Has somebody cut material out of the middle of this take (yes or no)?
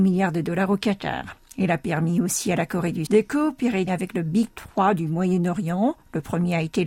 yes